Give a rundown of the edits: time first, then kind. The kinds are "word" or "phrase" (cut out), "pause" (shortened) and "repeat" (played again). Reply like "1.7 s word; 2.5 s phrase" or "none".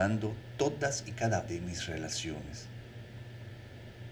1.5 s word